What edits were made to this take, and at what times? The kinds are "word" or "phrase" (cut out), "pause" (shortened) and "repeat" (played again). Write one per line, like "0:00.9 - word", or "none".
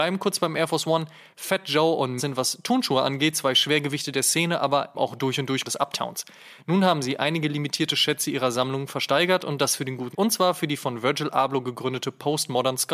0:02.2 - word
0:04.9 - word
0:05.6 - word
0:10.1 - word